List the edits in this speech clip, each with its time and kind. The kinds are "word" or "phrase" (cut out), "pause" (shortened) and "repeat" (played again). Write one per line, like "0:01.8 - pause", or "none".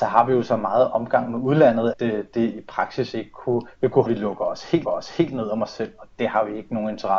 0:01.9 - word
0:04.1 - phrase
0:04.8 - repeat

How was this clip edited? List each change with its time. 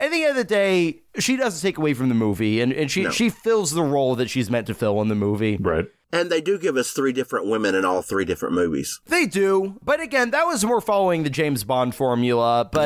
0:01.1 - pause

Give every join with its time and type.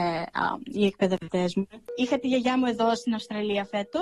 none

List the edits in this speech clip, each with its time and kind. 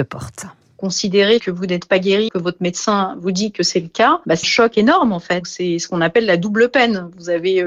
0:02.3 - word
0:04.4 - word

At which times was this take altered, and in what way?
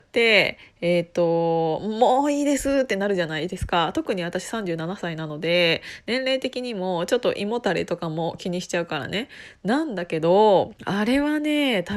0:10.8 - pause

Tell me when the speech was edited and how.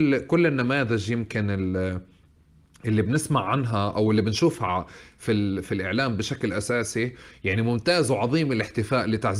none

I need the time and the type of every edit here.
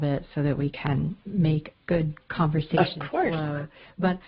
0:01.7 - word

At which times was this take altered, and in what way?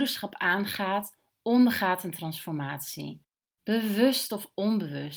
none

